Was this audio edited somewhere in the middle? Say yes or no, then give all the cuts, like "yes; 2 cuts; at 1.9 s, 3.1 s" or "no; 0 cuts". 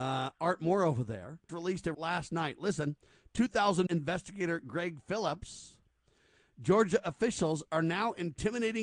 yes; 3 cuts; at 1.5 s, 1.9 s, 3.9 s